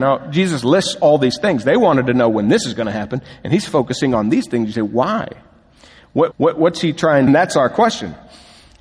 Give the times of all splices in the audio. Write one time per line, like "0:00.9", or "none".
0:06.3
0:07.3